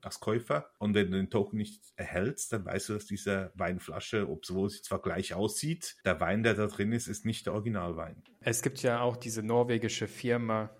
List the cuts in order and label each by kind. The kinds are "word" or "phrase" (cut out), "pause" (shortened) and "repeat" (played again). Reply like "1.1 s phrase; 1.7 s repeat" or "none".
none